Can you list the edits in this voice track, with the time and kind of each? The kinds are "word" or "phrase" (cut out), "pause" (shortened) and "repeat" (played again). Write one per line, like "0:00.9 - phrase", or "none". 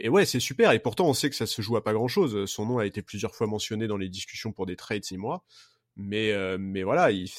0:05.1 - word